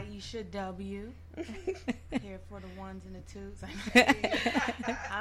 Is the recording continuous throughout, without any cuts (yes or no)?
yes